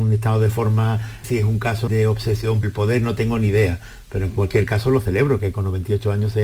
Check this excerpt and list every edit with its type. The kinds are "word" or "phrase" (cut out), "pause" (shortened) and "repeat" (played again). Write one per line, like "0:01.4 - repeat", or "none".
0:01.2 - word
0:01.9 - word
0:02.6 - word